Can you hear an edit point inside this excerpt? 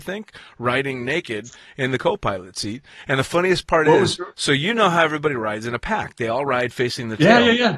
yes; 1 cut; at 4.3 s

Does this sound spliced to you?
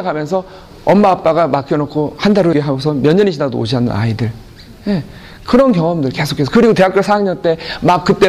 yes; 1 cut; at 2.5 s

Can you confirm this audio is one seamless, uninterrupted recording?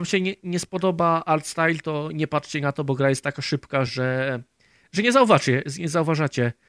yes; 0 cuts

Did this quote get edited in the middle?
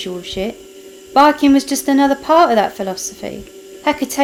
no; 0 cuts

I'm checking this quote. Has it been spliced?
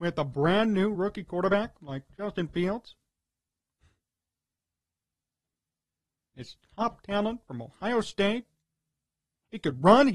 no; 0 cuts

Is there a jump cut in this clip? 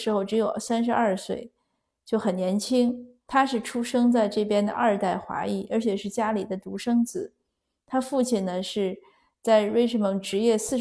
no; 0 cuts

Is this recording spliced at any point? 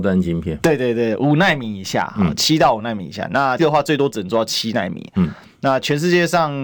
yes; 1 cut; at 3.6 s

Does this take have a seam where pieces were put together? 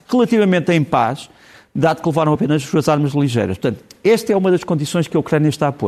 no; 0 cuts

